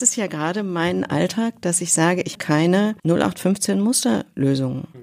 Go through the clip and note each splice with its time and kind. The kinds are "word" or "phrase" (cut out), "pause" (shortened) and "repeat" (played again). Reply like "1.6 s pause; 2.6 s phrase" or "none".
2.3 s word